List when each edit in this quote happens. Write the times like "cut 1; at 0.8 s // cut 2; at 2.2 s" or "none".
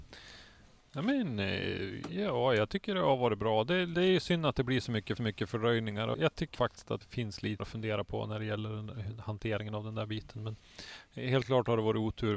cut 1; at 5.2 s // cut 2; at 6.1 s // cut 3; at 6.5 s // cut 4; at 7.0 s // cut 5; at 7.6 s